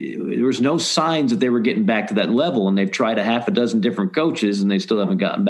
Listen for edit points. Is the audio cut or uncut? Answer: uncut